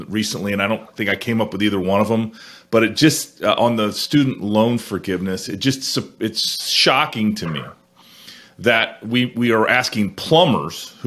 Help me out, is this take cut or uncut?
uncut